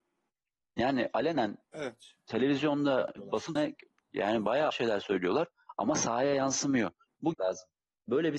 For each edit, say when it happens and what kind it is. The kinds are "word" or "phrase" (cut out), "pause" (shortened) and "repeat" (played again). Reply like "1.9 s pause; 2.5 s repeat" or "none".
1.6 s pause; 3.2 s word; 3.6 s phrase; 4.7 s word; 7.3 s phrase